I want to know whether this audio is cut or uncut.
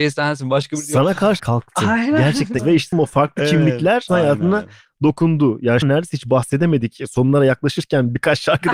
cut